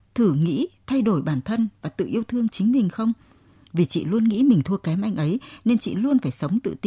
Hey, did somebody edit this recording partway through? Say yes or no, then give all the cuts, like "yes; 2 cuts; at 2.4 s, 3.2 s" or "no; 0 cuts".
no; 0 cuts